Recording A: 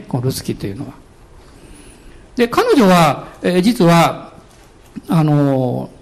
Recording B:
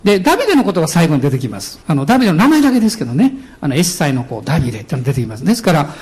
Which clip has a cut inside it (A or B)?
B